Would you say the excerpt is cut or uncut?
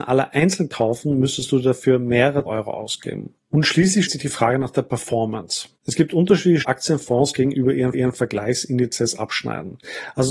cut